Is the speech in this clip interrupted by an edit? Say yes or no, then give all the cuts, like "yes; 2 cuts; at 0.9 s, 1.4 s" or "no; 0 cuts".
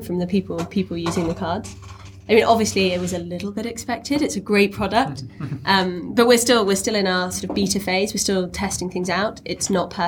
no; 0 cuts